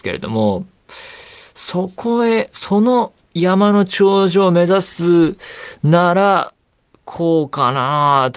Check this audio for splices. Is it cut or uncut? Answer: uncut